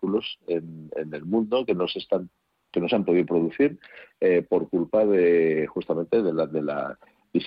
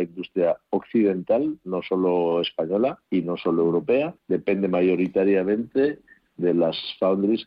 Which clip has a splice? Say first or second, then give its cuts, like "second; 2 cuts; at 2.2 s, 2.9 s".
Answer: second; 2 cuts; at 3.0 s, 4.2 s